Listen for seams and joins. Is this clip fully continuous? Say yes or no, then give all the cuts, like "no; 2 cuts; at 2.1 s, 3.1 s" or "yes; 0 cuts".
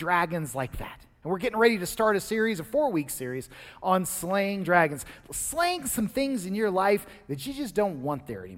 yes; 0 cuts